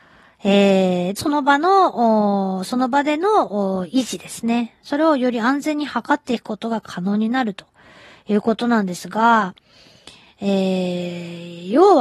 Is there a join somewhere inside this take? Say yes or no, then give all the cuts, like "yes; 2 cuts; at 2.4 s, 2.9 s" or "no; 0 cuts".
yes; 1 cut; at 1.1 s